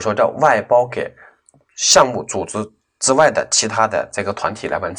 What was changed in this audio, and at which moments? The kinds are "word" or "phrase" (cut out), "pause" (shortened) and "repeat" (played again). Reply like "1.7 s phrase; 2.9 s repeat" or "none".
none